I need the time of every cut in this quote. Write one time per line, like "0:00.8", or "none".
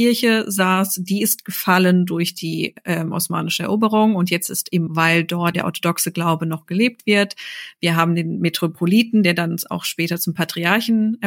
0:04.9
0:05.5

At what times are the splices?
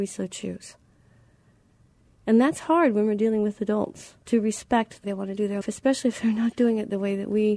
0:04.2
0:05.0
0:05.6

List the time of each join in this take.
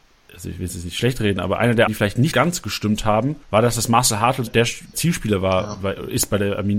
0:01.9
0:02.3
0:03.4
0:04.5
0:04.9

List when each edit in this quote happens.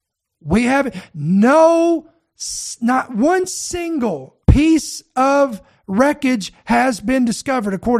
0:04.4

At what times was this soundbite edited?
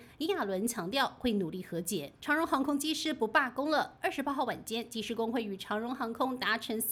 0:02.2

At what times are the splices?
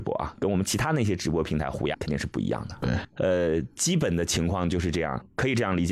0:01.9

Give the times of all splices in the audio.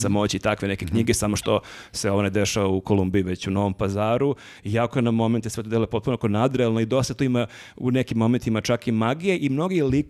none

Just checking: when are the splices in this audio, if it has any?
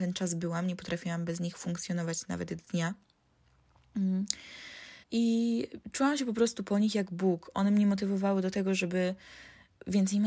0:05.0

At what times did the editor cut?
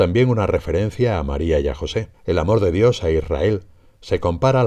0:02.1

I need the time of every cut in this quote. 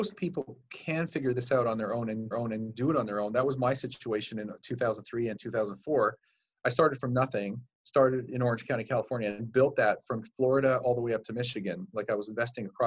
0:02.3

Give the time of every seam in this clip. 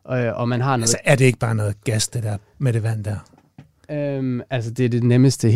none

